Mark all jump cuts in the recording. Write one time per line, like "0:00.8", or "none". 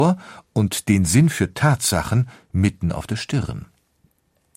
none